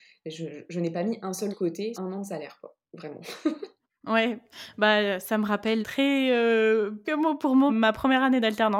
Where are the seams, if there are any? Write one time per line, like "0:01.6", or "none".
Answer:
0:01.5
0:01.9
0:05.8
0:07.0
0:07.7